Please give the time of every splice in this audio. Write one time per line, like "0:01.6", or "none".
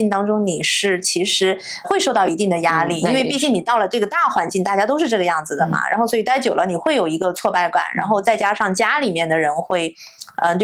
0:01.8